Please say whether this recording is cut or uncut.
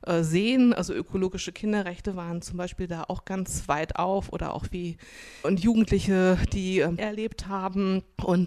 cut